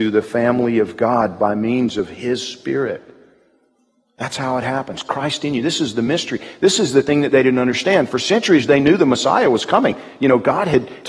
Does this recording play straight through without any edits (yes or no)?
yes